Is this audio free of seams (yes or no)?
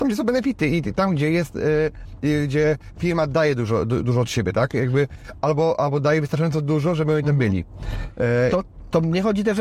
yes